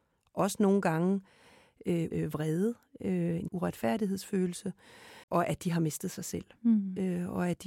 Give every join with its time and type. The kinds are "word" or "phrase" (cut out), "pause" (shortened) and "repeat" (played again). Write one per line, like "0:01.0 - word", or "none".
0:02.1 - word
0:03.5 - word
0:05.2 - pause